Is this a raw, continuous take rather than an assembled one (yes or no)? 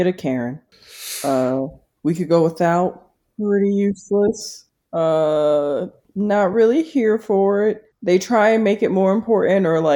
yes